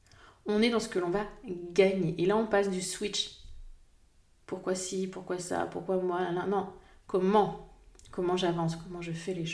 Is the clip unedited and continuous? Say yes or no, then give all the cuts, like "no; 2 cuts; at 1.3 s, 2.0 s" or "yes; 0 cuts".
yes; 0 cuts